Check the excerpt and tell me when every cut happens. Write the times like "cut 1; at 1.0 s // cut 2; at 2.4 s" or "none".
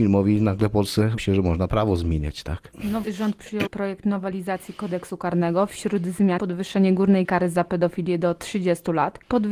cut 1; at 1.2 s // cut 2; at 3.0 s // cut 3; at 3.7 s // cut 4; at 6.4 s // cut 5; at 7.2 s